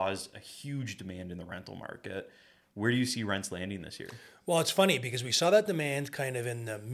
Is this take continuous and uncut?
yes; 0 cuts

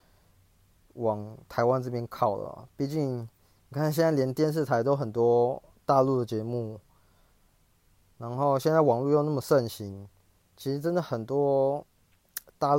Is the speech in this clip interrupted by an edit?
no; 0 cuts

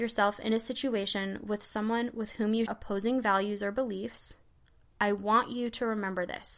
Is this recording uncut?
no; 1 cut; at 2.7 s

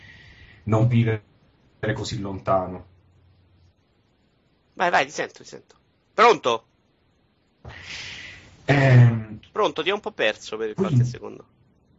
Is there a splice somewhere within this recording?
yes; 2 cuts; at 0.9 s, 5.9 s

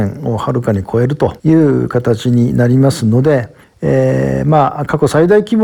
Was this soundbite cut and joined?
yes; 2 cuts; at 1.4 s, 3.6 s

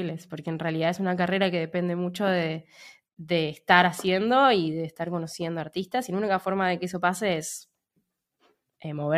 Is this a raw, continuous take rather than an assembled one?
yes; 0 cuts

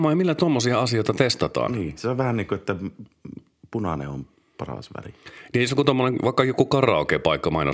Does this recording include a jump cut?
no; 0 cuts

